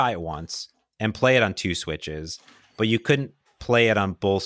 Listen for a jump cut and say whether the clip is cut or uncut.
uncut